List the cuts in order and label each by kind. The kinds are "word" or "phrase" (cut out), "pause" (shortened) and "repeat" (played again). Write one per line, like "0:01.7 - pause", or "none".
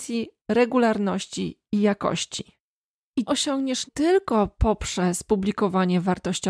0:03.3 - word
0:03.9 - word